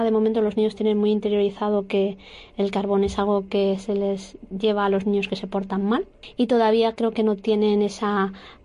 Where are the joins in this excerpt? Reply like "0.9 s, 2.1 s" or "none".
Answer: none